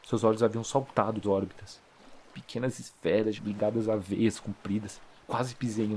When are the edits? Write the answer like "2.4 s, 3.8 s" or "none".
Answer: 1.2 s, 3.4 s